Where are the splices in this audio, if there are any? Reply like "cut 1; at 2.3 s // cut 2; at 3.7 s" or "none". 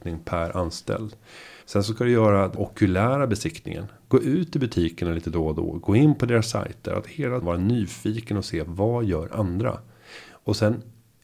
cut 1; at 1.6 s // cut 2; at 2.5 s // cut 3; at 7.4 s

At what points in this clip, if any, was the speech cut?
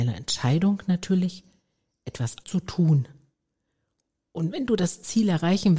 cut 1; at 2.4 s

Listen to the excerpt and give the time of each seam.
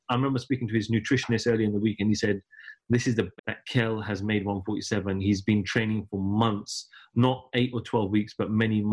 cut 1; at 3.4 s

